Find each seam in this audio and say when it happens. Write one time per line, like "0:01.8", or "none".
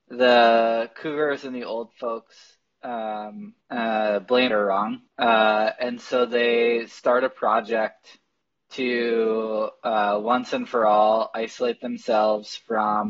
0:03.6
0:04.5
0:05.1